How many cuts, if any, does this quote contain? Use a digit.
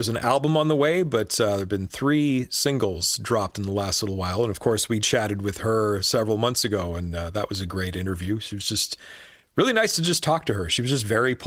0